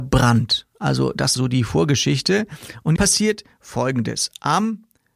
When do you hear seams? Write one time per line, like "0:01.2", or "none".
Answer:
0:01.4
0:03.0